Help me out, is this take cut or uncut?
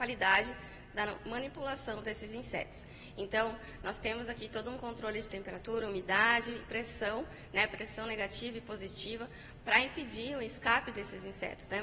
uncut